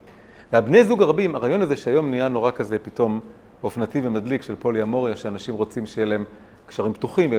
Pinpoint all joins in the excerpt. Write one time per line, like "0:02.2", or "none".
none